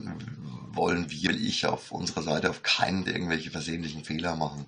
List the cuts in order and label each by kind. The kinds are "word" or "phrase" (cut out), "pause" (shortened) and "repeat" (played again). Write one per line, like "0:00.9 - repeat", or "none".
0:01.3 - word
0:03.1 - word